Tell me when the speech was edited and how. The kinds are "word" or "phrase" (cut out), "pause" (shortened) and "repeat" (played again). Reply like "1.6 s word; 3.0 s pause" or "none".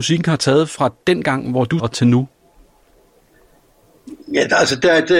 1.8 s word

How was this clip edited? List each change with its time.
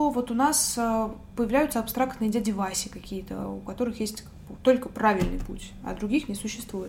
4.6 s word

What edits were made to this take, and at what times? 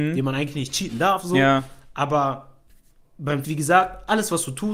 3.4 s word

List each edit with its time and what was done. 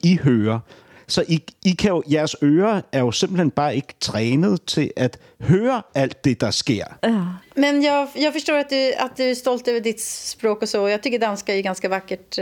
7.0 s pause

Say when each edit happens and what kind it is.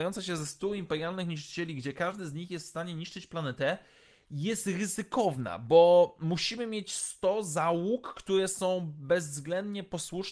none

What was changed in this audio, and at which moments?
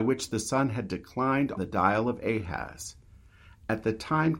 1.6 s word

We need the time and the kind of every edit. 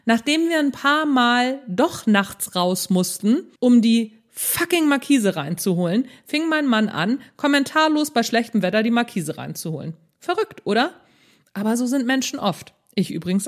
3.6 s pause

